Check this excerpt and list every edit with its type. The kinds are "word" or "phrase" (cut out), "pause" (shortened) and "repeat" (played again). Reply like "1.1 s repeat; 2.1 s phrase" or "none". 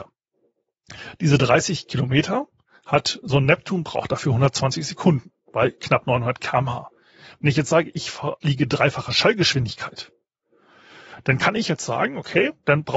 3.2 s word